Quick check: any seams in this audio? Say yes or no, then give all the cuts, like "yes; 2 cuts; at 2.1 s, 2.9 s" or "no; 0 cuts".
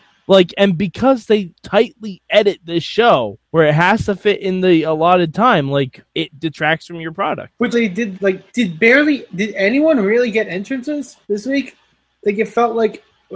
yes; 7 cuts; at 1.5 s, 3.4 s, 6.1 s, 7.7 s, 8.1 s, 8.5 s, 11.2 s